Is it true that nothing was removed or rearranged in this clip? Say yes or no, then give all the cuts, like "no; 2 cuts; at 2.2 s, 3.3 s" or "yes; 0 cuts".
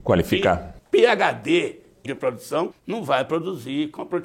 no; 2 cuts; at 2.0 s, 2.7 s